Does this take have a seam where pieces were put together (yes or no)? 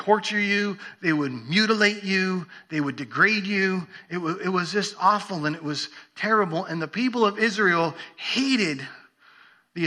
no